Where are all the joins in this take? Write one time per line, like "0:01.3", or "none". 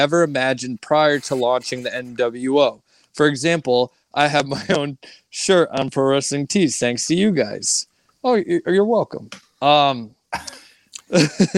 none